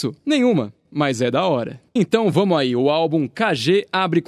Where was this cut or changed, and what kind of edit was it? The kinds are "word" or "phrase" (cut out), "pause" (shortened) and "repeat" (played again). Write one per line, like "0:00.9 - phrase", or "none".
0:01.9 - pause